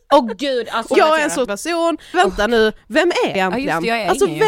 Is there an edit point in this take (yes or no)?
yes